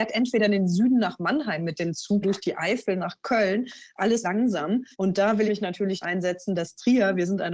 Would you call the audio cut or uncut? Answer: cut